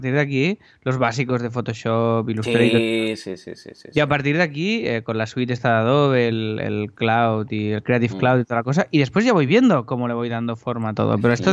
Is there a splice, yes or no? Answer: no